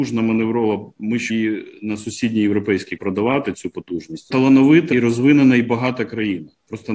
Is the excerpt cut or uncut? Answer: cut